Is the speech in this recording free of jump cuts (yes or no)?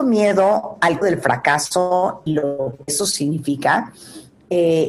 no